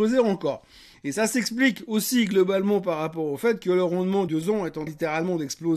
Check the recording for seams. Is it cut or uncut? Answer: cut